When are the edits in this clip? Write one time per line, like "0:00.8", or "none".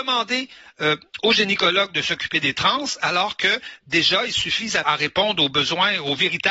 0:04.8